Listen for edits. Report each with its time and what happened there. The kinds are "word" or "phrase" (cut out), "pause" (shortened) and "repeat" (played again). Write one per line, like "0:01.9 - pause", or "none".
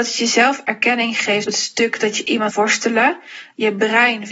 0:01.5 - word
0:02.5 - word